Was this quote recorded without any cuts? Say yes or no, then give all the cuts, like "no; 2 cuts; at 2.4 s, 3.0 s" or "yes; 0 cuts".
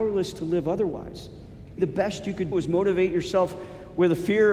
no; 2 cuts; at 1.8 s, 2.5 s